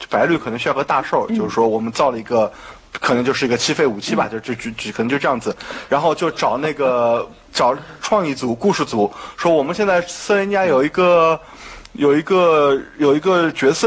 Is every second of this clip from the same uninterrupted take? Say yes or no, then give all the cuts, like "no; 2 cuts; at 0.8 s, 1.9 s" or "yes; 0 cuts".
yes; 0 cuts